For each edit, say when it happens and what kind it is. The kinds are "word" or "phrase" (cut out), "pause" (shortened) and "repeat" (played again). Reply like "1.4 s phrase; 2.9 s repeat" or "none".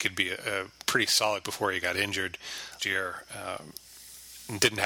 1.4 s word; 2.8 s word